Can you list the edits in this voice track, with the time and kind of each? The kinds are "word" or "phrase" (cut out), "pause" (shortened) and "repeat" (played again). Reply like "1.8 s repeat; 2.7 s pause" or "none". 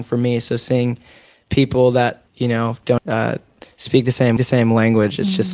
2.3 s pause; 3.0 s word; 4.4 s repeat